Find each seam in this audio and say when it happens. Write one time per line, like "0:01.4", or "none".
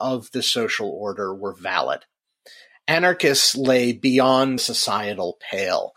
0:04.6